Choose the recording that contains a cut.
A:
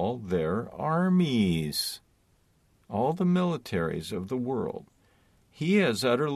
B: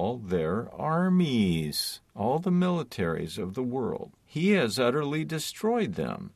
B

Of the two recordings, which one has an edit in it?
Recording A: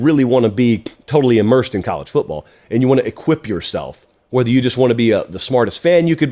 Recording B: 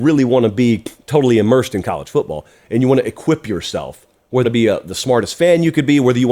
B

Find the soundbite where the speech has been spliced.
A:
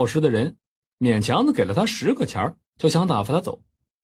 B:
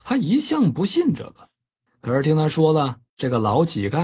B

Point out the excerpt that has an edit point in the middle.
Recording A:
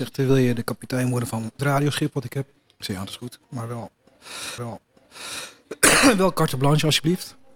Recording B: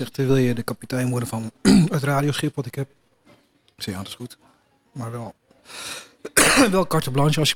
A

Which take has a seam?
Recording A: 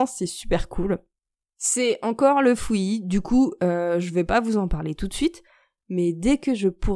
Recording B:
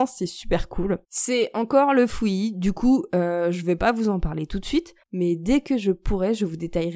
B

